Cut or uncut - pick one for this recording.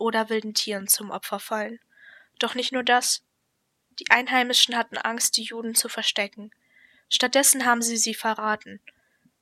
uncut